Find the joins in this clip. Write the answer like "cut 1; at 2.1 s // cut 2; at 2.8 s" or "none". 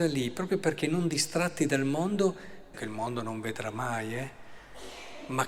cut 1; at 2.7 s